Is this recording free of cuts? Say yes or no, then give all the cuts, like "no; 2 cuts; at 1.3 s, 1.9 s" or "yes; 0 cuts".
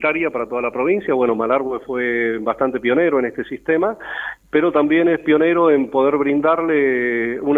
yes; 0 cuts